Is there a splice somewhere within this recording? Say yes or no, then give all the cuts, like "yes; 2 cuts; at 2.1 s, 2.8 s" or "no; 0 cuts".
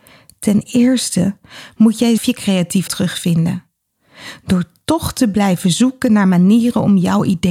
yes; 2 cuts; at 2.2 s, 2.9 s